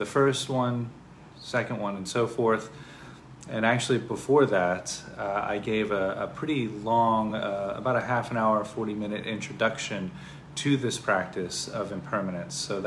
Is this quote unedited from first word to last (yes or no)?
yes